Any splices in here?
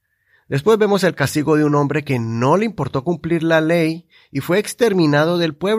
no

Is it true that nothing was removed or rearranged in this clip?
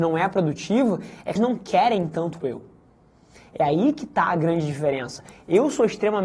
no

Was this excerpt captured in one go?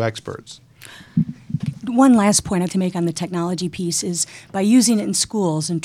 no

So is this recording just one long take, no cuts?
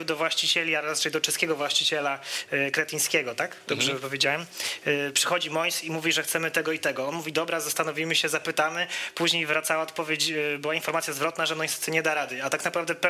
yes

